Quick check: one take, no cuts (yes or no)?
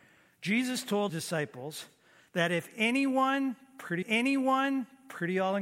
no